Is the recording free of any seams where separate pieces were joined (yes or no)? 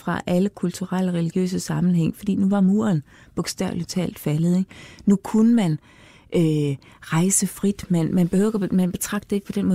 yes